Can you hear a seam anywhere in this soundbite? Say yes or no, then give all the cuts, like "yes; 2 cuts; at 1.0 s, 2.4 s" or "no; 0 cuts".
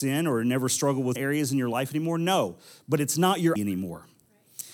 yes; 2 cuts; at 1.2 s, 3.6 s